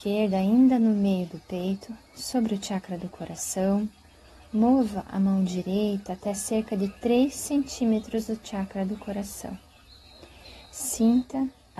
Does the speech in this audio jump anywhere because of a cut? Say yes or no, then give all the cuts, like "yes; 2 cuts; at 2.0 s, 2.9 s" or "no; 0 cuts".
no; 0 cuts